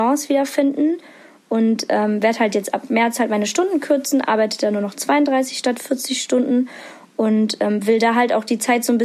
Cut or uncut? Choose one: uncut